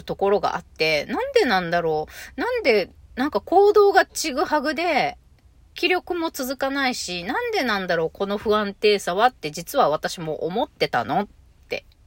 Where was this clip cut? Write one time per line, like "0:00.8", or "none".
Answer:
none